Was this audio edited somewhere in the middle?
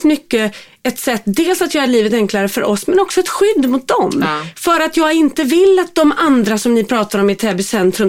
no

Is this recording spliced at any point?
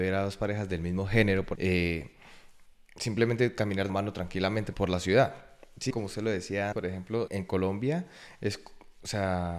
yes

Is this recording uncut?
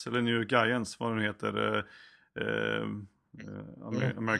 yes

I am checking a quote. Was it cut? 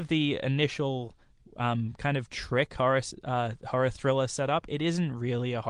no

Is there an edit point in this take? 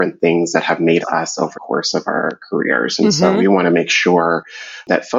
yes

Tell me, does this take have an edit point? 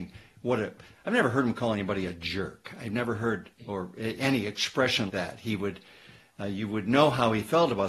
yes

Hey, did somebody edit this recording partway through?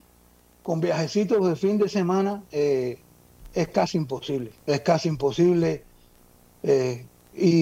yes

